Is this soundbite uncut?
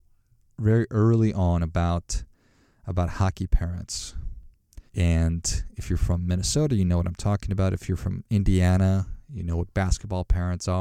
no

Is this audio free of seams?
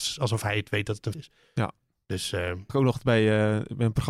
no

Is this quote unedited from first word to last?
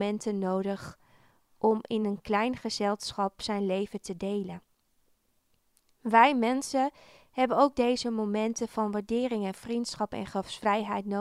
yes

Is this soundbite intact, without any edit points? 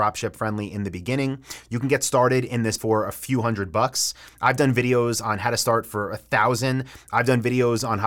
no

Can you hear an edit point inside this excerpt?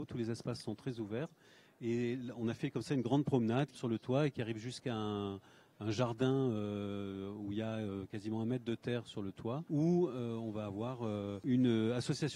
yes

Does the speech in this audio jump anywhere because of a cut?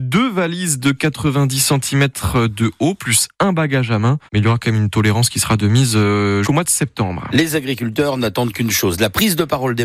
yes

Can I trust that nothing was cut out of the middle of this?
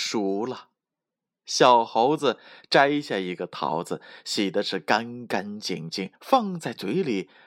no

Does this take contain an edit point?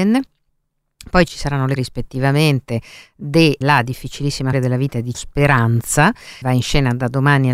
yes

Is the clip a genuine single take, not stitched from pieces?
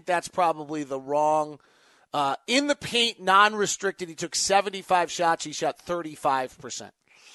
yes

